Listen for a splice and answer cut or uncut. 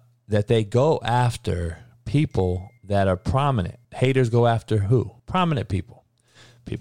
cut